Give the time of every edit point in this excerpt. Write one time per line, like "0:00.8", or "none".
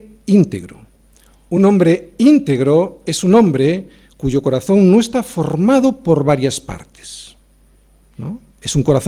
none